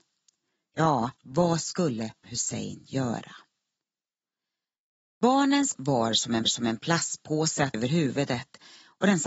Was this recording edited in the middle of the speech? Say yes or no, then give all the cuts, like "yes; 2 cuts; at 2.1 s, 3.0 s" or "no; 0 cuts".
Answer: yes; 5 cuts; at 1.2 s, 2.2 s, 5.7 s, 6.5 s, 7.7 s